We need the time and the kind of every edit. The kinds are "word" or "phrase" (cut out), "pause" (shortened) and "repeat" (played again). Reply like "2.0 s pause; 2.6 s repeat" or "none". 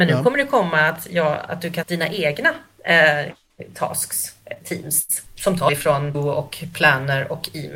1.8 s word; 4.6 s word; 5.7 s phrase; 6.1 s word